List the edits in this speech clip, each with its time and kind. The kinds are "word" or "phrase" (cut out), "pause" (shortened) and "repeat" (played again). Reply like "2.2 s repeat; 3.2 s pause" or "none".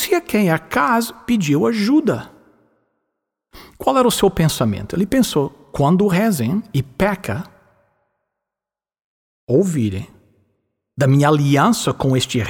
none

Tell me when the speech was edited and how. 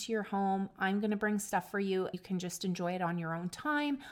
2.1 s word

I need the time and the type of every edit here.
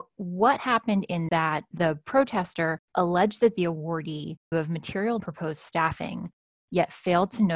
1.3 s phrase; 2.8 s pause; 4.5 s word; 5.2 s phrase

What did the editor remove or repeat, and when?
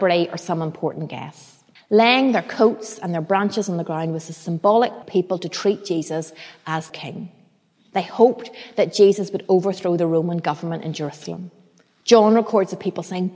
1.8 s pause; 5.0 s phrase; 6.9 s word

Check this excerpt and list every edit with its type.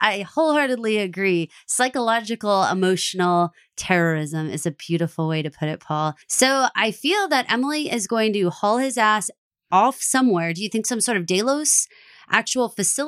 6.2 s pause

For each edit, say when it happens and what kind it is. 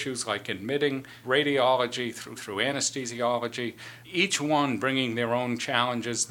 1.2 s word; 2.4 s word; 4.0 s word

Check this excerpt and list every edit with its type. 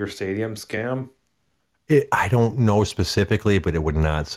none

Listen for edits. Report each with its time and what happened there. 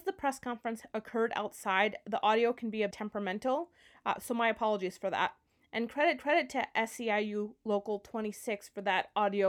2.9 s word; 6.2 s repeat

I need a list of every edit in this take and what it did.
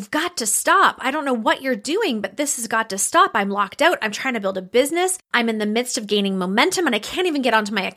5.2 s pause

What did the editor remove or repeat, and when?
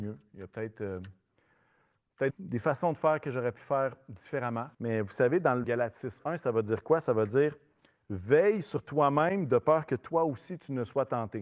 2.3 s word; 4.7 s pause; 5.6 s phrase

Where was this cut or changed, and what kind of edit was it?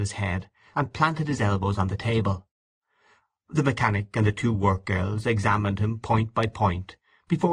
none

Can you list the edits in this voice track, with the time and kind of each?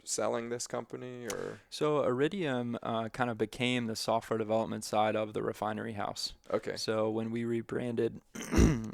none

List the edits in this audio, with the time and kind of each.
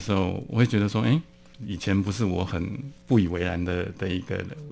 3.0 s pause

